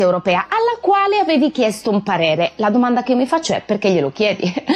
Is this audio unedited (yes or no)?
yes